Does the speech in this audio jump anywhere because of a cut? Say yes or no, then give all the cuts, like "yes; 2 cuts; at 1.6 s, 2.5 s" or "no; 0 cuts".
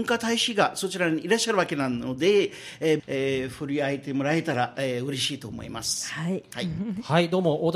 yes; 1 cut; at 3.0 s